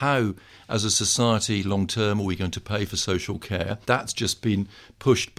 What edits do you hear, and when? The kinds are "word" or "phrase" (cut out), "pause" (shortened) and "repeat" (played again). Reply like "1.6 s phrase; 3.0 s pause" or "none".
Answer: 3.8 s pause